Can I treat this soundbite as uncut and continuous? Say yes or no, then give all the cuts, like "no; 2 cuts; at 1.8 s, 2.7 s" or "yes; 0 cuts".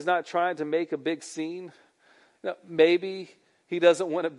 yes; 0 cuts